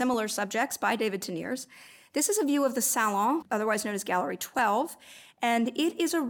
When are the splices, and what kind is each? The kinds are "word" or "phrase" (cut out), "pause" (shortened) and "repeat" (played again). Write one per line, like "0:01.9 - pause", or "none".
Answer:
none